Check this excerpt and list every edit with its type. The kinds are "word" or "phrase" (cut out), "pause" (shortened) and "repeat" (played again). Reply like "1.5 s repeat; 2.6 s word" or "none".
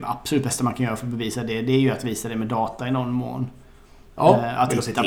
none